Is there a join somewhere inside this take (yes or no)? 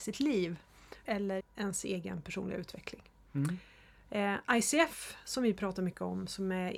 yes